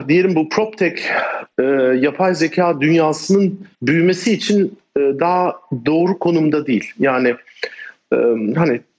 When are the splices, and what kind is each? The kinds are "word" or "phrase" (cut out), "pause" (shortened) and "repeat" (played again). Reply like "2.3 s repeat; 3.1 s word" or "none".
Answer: 3.7 s pause